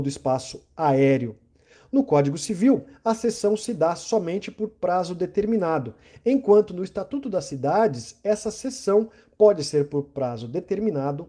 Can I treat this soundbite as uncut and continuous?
yes; 0 cuts

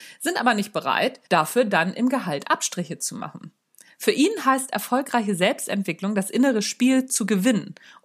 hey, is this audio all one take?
no; 1 cut; at 1.3 s

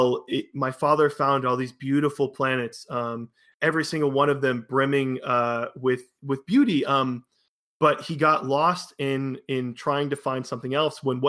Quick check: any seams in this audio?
no; 0 cuts

